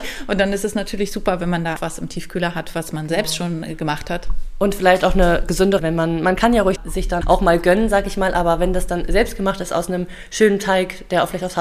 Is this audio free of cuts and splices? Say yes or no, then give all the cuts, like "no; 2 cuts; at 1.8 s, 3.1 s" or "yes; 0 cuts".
no; 4 cuts; at 1.8 s, 5.8 s, 6.8 s, 7.2 s